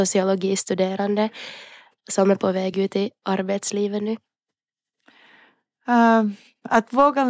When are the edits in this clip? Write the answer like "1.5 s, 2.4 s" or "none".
none